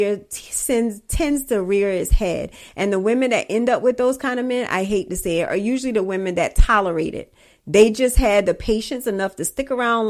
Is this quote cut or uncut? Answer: uncut